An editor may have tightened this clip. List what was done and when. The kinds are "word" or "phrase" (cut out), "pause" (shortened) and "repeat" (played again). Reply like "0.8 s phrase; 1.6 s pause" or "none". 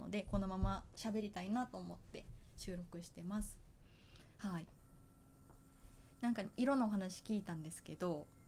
6.1 s pause